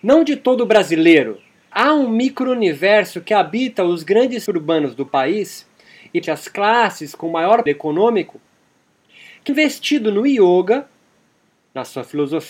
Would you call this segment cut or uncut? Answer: cut